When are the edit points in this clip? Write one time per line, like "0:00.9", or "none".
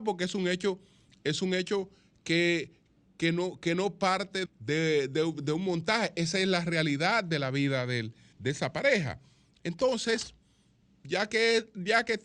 0:04.5
0:08.3